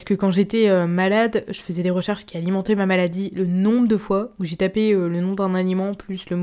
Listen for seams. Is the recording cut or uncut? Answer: uncut